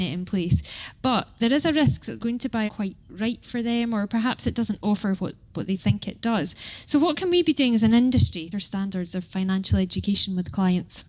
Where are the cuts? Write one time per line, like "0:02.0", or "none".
0:02.2
0:02.7
0:08.5